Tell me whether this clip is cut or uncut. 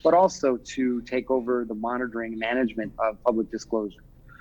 uncut